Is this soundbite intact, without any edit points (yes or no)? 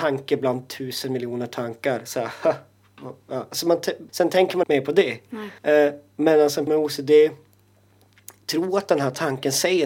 no